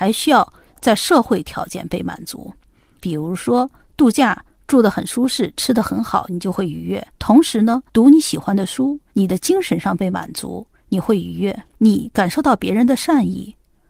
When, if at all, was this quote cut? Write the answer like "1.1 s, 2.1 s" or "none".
7.1 s, 7.9 s, 9.1 s, 11.7 s